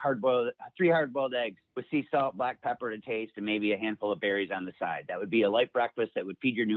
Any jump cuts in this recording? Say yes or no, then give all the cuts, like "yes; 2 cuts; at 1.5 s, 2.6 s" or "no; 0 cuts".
yes; 1 cut; at 1.7 s